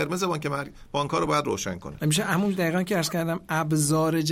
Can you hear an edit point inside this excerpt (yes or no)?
no